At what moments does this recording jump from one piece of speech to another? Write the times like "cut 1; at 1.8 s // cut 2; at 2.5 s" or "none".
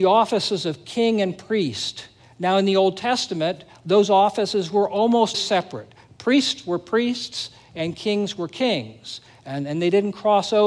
cut 1; at 5.3 s